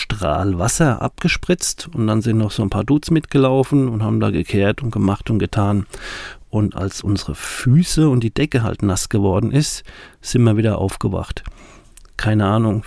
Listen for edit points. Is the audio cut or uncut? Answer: uncut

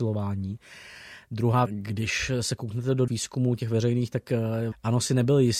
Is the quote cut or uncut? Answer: cut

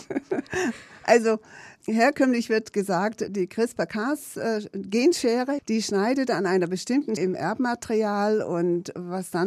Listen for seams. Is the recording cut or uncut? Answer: cut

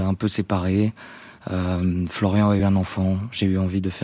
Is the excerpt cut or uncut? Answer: uncut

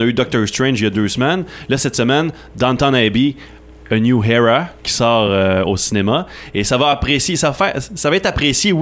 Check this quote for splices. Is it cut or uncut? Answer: uncut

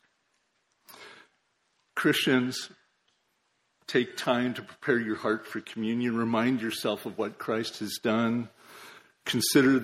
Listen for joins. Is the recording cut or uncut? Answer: uncut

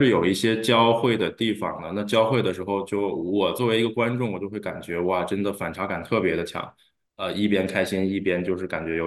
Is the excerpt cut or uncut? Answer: uncut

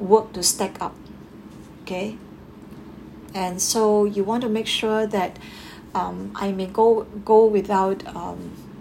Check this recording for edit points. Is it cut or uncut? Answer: uncut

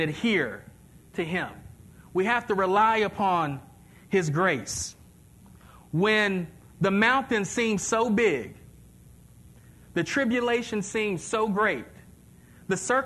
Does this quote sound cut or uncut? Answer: uncut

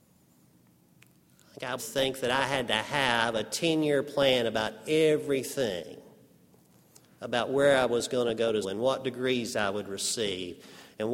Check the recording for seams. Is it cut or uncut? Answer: cut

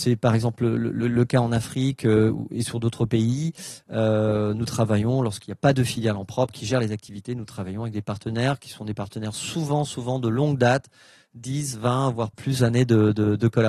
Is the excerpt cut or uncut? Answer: cut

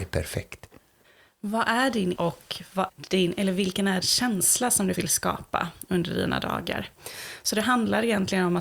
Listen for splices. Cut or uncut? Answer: cut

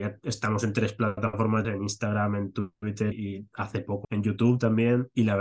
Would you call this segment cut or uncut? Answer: cut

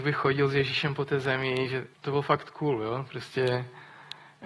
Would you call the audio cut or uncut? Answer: cut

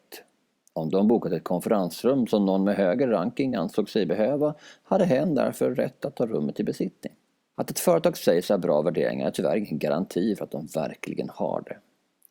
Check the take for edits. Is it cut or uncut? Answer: uncut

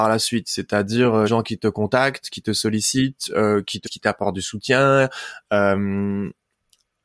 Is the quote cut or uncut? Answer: cut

